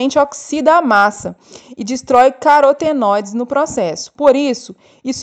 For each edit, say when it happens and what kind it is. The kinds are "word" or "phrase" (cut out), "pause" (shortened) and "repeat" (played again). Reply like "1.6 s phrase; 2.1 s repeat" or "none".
none